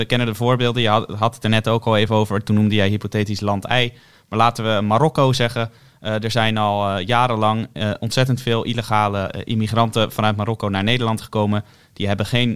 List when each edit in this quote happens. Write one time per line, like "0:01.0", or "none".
none

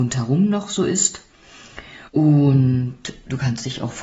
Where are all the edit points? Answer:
0:02.1

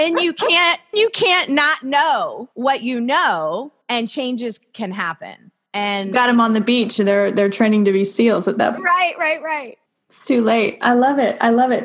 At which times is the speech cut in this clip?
0:00.9
0:02.5
0:03.8
0:08.8
0:09.9

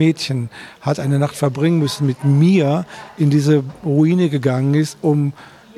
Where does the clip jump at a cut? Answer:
none

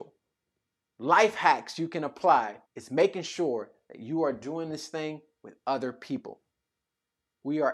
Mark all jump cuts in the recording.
0:02.6

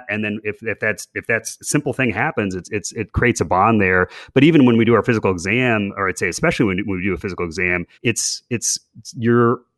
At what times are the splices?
0:07.9

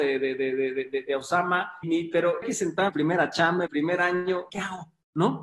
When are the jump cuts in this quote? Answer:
0:01.8
0:02.4
0:02.9
0:03.7
0:04.5

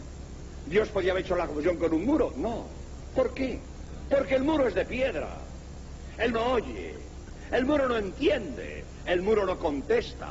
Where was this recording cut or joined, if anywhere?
0:06.3

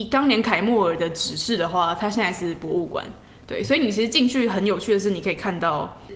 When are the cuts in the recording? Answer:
none

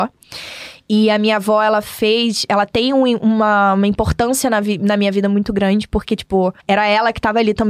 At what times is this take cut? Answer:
0:06.6

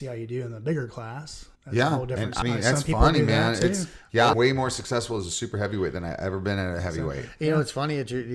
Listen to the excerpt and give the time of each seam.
0:01.6
0:02.4
0:04.3

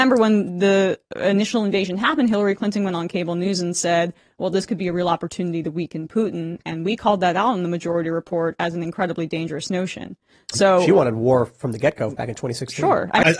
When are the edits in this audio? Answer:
none

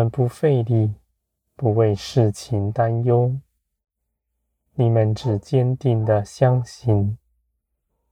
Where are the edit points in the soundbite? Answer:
0:01.2

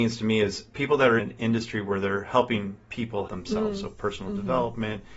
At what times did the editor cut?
0:01.2
0:03.3

